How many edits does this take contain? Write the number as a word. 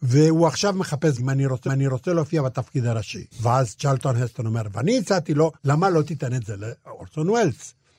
four